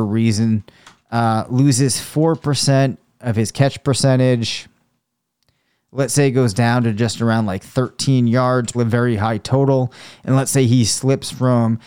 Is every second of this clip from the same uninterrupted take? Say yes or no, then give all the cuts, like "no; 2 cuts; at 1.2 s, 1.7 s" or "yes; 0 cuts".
no; 1 cut; at 8.7 s